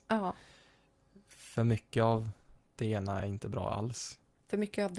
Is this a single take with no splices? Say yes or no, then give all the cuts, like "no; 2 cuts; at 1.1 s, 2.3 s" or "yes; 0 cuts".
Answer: yes; 0 cuts